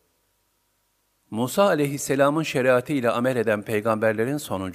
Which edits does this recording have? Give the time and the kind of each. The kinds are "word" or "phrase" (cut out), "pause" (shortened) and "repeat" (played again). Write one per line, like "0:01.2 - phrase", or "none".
none